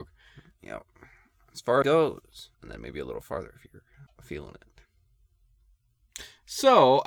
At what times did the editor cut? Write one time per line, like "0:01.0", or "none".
0:01.8
0:02.5
0:04.1